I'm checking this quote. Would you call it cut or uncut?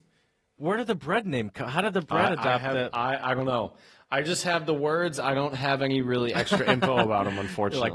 uncut